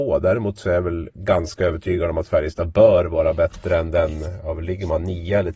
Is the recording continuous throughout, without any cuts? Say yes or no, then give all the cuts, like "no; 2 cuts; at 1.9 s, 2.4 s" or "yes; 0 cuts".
yes; 0 cuts